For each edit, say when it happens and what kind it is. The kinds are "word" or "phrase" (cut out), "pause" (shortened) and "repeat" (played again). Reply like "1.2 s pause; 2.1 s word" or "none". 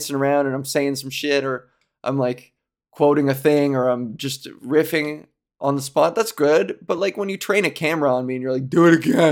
none